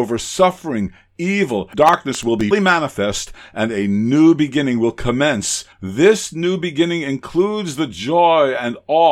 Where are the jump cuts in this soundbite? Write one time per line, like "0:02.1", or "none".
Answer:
0:01.7
0:02.5
0:05.7